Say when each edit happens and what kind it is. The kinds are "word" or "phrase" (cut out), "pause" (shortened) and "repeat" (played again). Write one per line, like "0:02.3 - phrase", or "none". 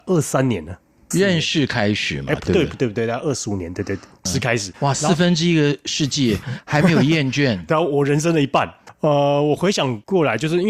0:04.3 - phrase

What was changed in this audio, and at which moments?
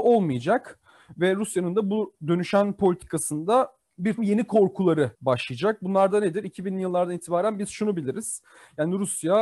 0:04.2 - word
0:05.1 - pause

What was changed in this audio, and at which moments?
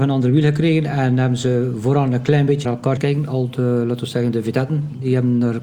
0:02.6 - word
0:03.0 - word

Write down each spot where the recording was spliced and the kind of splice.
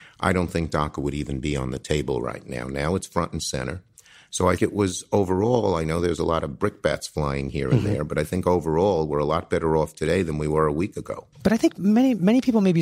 0:04.6 - word
0:11.3 - pause

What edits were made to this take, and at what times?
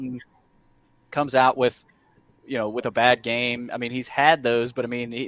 none

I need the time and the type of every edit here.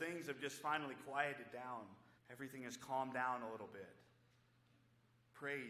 0:02.2 - pause

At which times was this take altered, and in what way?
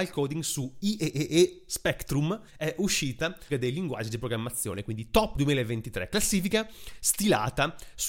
0:02.5 - pause
0:03.5 - phrase
0:05.3 - phrase

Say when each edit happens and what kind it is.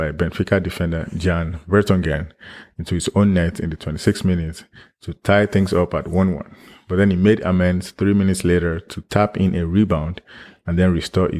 none

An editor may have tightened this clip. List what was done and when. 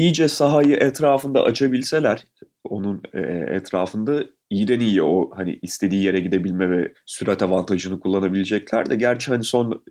none

